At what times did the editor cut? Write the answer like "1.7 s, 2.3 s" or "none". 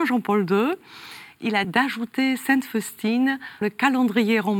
1.6 s, 3.6 s